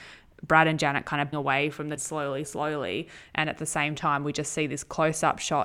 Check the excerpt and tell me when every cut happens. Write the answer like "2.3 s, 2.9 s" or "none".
1.3 s, 2.0 s, 2.4 s